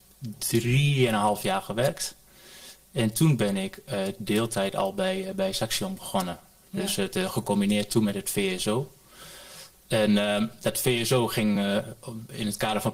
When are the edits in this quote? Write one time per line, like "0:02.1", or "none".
none